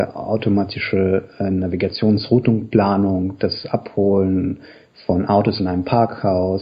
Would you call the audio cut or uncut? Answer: uncut